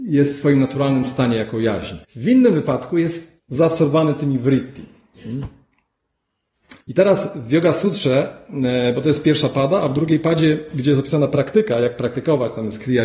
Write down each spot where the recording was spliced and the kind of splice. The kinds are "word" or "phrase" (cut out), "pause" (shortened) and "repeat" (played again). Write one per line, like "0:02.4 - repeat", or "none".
0:02.0 - pause
0:03.4 - pause
0:06.8 - pause